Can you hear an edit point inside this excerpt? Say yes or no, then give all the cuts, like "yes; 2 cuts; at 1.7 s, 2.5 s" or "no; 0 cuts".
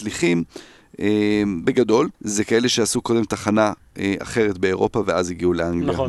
yes; 1 cut; at 2.1 s